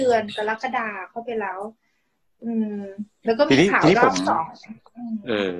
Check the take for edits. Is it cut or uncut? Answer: uncut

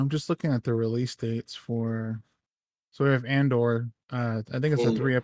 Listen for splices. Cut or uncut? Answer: uncut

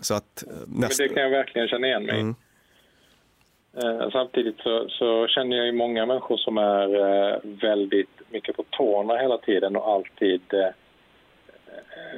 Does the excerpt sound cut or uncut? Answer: uncut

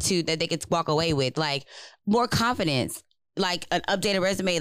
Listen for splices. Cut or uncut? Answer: uncut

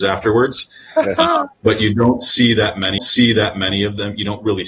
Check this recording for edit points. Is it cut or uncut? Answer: cut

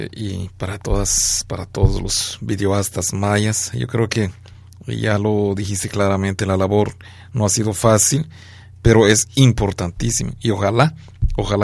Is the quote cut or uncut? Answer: uncut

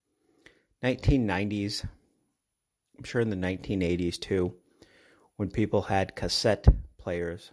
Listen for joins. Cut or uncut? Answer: uncut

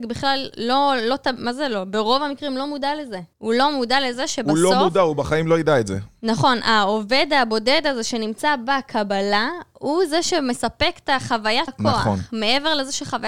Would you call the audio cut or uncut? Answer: cut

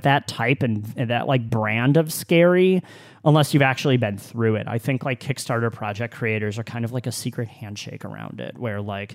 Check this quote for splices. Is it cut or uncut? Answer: uncut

